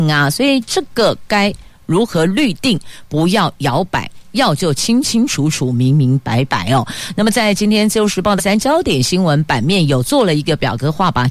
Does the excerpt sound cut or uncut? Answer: cut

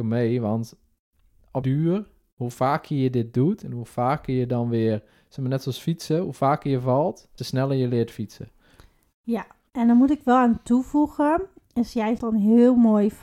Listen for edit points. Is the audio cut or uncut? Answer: cut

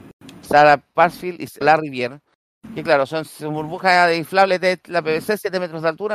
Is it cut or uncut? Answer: cut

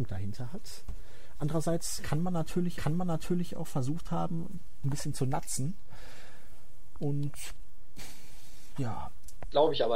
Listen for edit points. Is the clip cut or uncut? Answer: cut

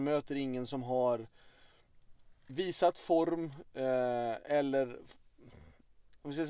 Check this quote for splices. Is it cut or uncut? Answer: cut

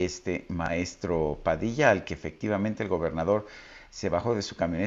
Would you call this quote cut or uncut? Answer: uncut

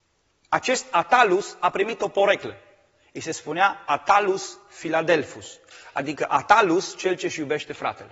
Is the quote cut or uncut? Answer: uncut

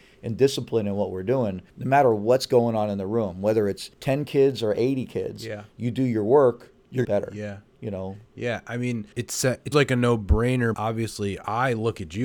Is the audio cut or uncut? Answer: cut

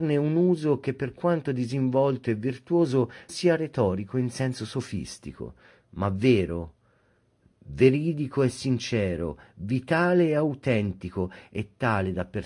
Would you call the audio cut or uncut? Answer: cut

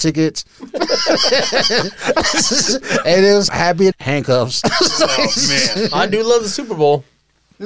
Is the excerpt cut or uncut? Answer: cut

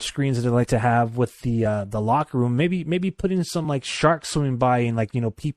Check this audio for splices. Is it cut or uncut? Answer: uncut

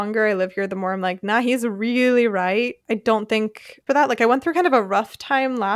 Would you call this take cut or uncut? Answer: cut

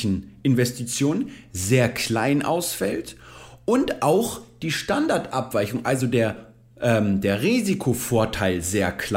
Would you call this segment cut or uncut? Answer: uncut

